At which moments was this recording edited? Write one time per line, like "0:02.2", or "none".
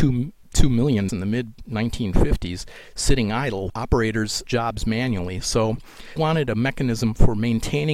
0:01.1
0:03.7
0:04.4
0:06.2